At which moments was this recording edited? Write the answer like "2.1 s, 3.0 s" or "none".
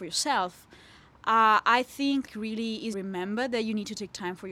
2.3 s, 2.9 s